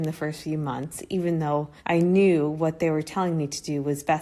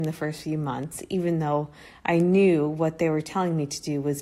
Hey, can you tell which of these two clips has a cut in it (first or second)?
first